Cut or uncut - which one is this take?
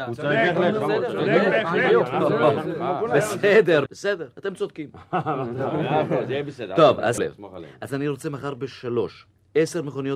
cut